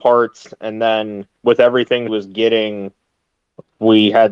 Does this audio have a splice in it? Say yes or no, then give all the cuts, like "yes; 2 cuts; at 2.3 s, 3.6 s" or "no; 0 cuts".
yes; 2 cuts; at 1.4 s, 2.1 s